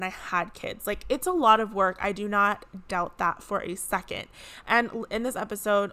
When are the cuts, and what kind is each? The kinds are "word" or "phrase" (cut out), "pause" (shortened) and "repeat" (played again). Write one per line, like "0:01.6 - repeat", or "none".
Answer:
none